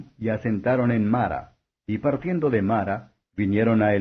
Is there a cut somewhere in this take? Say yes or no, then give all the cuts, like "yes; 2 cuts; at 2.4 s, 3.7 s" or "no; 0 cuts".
yes; 1 cut; at 1.7 s